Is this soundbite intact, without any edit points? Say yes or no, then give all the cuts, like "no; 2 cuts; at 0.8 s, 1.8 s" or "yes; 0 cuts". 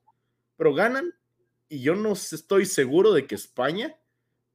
yes; 0 cuts